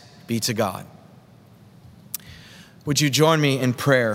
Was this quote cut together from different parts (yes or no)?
no